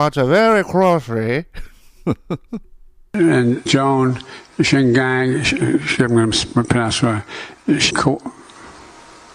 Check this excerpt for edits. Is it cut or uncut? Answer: cut